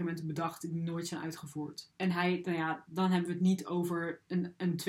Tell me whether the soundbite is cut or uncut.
uncut